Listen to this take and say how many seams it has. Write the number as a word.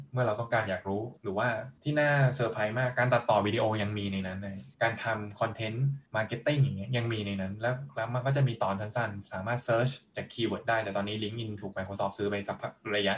four